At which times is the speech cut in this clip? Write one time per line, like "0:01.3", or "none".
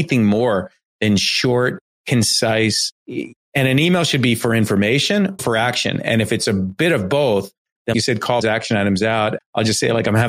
0:03.0
0:05.4
0:07.9
0:08.4
0:09.4

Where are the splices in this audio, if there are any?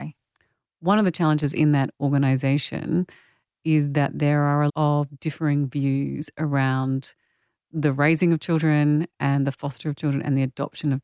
0:04.7

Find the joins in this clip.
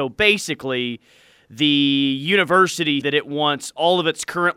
0:03.0

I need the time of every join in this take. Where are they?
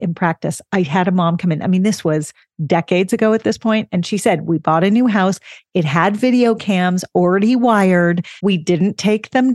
0:08.4

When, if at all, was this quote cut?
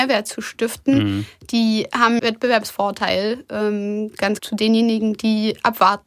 0:02.2
0:04.4

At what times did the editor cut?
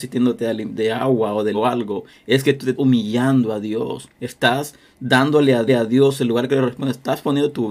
0:01.5
0:02.7
0:04.1
0:05.7

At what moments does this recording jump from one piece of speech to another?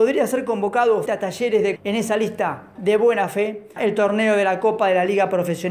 0:01.1
0:01.8
0:02.8
0:03.8

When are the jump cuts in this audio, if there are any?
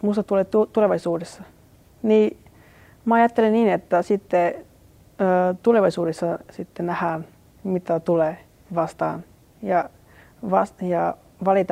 none

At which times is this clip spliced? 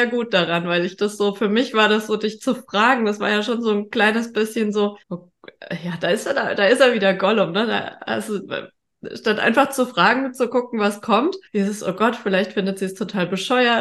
0:05.0
0:11.5

